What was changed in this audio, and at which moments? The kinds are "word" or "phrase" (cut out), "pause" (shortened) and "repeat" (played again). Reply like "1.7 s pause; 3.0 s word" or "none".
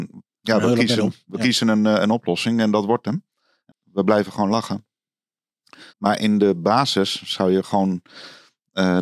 3.7 s phrase; 5.9 s pause